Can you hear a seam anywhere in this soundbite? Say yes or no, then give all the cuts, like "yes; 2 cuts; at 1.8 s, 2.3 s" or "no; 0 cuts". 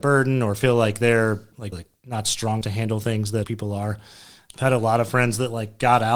yes; 3 cuts; at 1.7 s, 2.6 s, 3.4 s